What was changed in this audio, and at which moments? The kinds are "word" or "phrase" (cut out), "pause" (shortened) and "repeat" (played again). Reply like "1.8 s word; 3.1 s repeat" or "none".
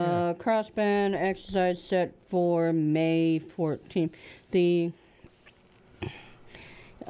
none